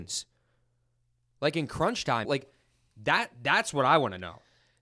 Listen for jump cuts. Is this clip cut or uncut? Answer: cut